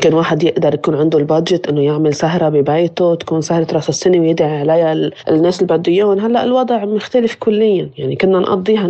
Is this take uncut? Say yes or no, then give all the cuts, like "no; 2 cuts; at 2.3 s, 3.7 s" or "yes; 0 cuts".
yes; 0 cuts